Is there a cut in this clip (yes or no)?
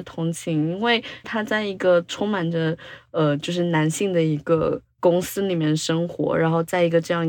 yes